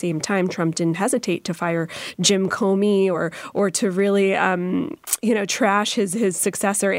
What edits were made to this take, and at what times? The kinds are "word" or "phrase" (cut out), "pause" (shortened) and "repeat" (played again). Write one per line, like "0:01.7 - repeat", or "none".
none

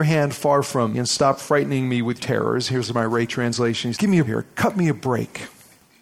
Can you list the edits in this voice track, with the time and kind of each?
0:00.9 - word
0:02.2 - word
0:03.3 - word
0:03.9 - word
0:04.3 - word

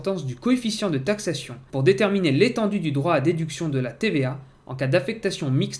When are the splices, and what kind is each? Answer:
none

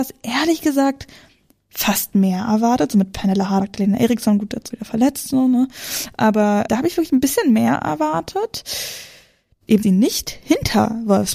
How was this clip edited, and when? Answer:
0:03.6 - word
0:04.7 - word
0:06.7 - word
0:09.8 - word

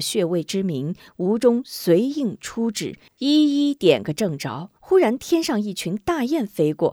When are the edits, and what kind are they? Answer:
0:04.8 - pause

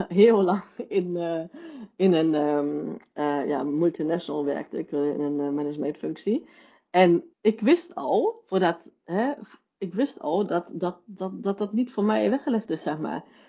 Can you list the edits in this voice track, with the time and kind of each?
0:07.3 - pause

